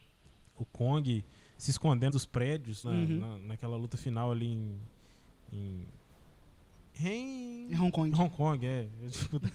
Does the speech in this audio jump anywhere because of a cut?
yes; 2 cuts; at 2.1 s, 2.8 s

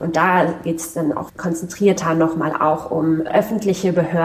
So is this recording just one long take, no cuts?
no; 1 cut; at 1.3 s

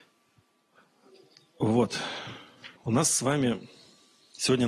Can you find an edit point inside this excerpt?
yes; 1 cut; at 2.8 s

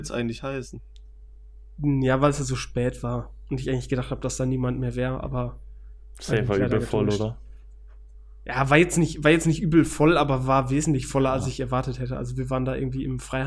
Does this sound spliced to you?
no; 0 cuts

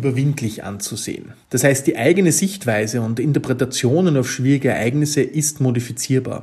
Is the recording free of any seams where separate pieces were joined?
no; 1 cut; at 1.4 s

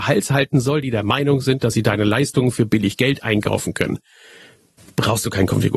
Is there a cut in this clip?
no; 0 cuts

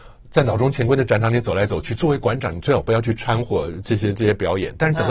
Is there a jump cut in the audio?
no; 0 cuts

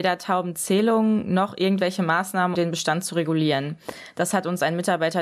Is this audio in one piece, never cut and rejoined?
no; 1 cut; at 2.5 s

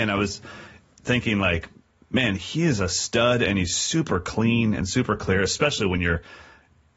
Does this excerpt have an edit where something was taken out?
no; 0 cuts

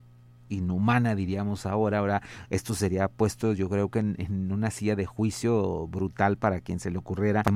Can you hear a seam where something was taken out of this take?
yes; 1 cut; at 4.2 s

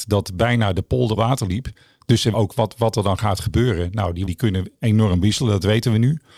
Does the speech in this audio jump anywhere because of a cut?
yes; 3 cuts; at 1.2 s, 2.3 s, 4.3 s

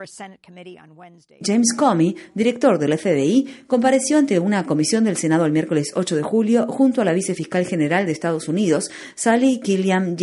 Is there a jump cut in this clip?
no; 0 cuts

